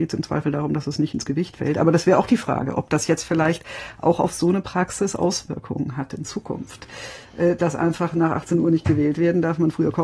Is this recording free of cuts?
yes; 0 cuts

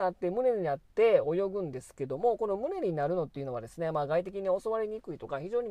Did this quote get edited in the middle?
no; 0 cuts

